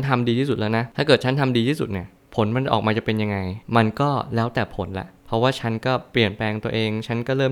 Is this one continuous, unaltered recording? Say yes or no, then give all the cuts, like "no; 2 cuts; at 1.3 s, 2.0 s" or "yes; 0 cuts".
no; 1 cut; at 3.6 s